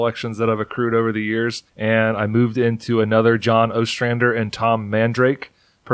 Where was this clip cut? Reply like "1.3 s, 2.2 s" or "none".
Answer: 1.7 s